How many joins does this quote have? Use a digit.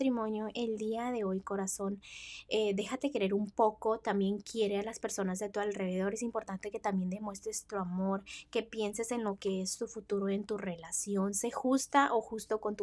0